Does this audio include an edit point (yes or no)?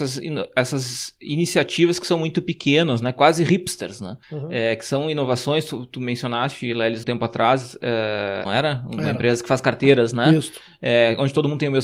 yes